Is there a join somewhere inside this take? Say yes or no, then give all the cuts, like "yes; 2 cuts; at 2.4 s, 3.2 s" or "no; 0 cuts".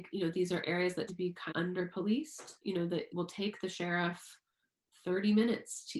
yes; 4 cuts; at 1.1 s, 1.5 s, 2.6 s, 3.1 s